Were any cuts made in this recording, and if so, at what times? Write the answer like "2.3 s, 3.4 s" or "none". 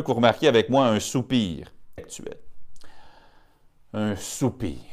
2.0 s